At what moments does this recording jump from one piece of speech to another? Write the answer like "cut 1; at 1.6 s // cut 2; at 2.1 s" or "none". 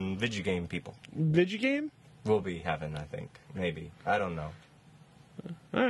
none